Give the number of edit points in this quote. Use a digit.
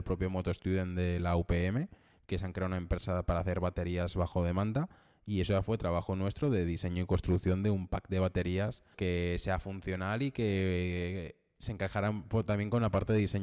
1